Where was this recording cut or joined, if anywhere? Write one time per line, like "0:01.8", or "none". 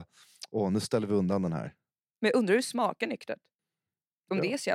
none

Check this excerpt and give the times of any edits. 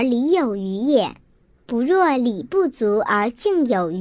none

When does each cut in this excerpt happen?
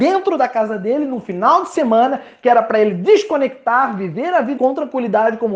0:04.6

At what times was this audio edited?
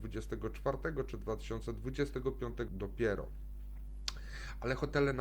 0:02.7

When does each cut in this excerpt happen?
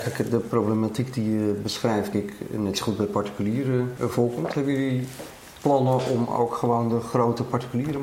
0:02.1
0:04.0

